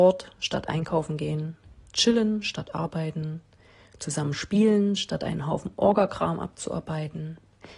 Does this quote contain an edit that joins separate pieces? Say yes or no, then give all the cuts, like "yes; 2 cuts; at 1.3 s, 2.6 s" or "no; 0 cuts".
no; 0 cuts